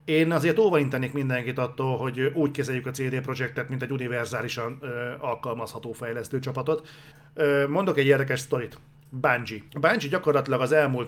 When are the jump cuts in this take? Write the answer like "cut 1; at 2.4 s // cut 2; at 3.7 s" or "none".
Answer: cut 1; at 7.1 s // cut 2; at 9.7 s